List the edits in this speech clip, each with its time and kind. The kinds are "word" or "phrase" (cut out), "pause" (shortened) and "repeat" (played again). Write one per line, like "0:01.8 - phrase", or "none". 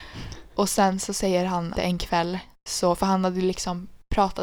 0:01.7 - word